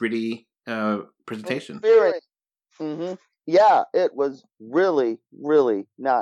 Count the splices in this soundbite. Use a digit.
1